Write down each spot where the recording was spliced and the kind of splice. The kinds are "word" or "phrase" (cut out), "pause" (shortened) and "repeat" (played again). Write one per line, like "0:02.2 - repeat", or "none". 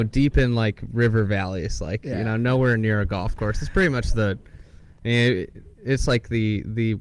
none